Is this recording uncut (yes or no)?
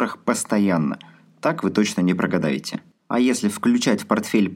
yes